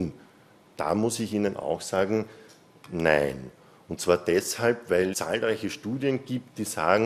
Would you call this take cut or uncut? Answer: cut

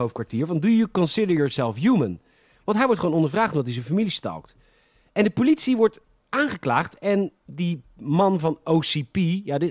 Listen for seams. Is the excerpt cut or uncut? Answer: uncut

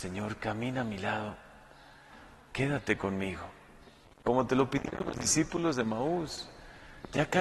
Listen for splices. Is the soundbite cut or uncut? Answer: uncut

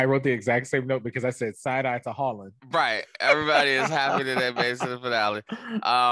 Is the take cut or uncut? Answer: cut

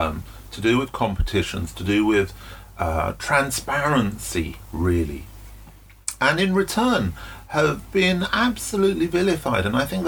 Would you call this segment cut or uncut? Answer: uncut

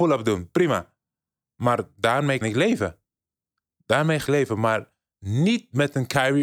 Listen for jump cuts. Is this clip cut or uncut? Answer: cut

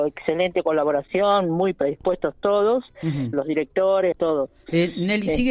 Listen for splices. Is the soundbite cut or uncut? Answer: cut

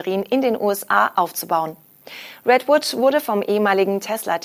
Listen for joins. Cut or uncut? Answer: uncut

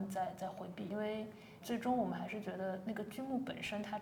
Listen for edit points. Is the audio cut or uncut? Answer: cut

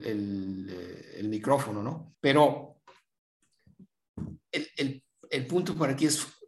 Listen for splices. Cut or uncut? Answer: cut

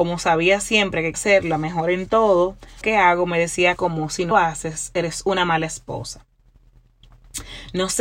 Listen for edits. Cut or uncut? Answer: cut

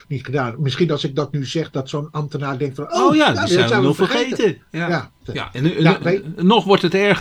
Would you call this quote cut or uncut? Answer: cut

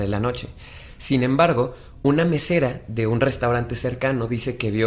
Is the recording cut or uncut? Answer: uncut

